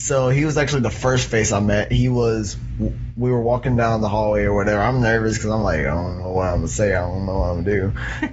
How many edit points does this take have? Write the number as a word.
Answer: zero